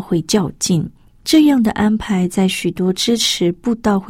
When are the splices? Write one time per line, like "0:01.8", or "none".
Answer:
0:01.0